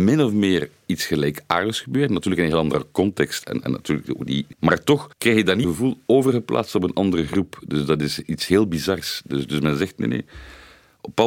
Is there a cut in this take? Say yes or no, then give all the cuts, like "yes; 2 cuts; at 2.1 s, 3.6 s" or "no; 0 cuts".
yes; 1 cut; at 5.6 s